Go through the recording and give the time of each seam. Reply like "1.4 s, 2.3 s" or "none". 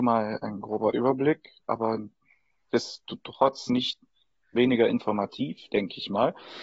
none